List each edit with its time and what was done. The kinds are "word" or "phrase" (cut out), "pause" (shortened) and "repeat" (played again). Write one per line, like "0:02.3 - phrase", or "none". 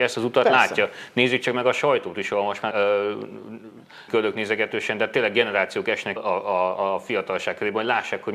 0:02.7 - word
0:04.1 - word
0:06.2 - phrase

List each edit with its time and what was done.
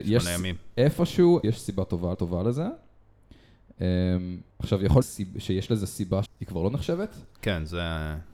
0:01.4 - word
0:02.1 - repeat
0:04.5 - pause
0:05.0 - phrase
0:06.3 - phrase

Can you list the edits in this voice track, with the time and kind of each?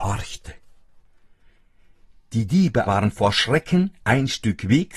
0:02.9 - word

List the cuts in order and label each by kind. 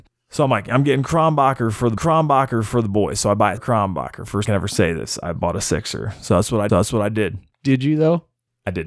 0:02.0 - repeat
0:03.6 - word
0:04.5 - phrase
0:06.7 - repeat

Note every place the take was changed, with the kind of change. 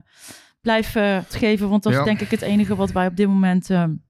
0:01.3 - word

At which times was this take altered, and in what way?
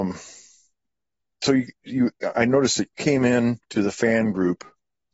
0:02.3 - word
0:02.9 - word
0:03.6 - pause

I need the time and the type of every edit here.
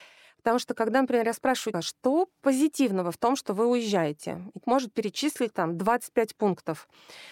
0:01.7 - word
0:04.6 - word

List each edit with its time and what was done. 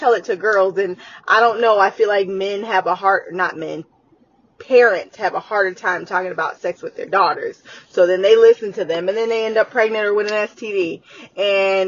none

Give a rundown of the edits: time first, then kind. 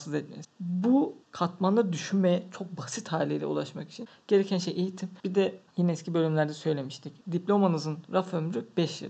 0:01.2 - pause
0:05.2 - pause
0:05.7 - pause
0:07.2 - pause

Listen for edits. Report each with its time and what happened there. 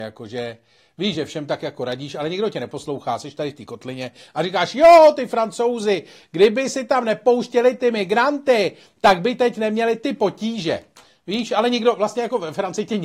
none

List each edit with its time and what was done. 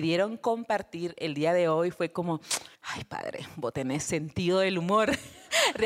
0:02.7 - pause

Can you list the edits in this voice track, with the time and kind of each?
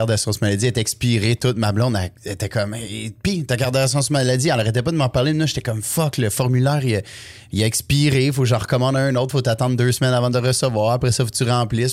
0:02.2 - pause

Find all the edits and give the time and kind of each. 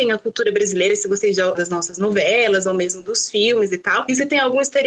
0:01.5 - phrase

